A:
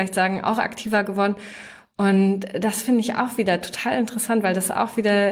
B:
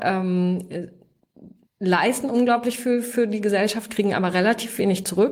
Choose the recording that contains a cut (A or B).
B